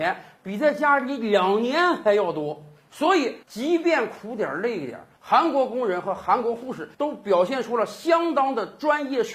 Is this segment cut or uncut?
cut